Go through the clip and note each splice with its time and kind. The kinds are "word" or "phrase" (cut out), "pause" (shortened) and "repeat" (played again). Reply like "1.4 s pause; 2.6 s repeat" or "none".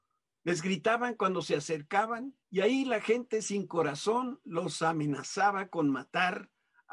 2.4 s pause